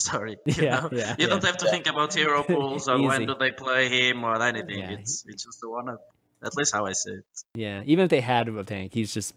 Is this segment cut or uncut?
uncut